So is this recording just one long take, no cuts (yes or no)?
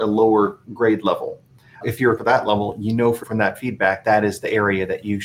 no